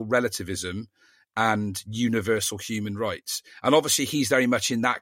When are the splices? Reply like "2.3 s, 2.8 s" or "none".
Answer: none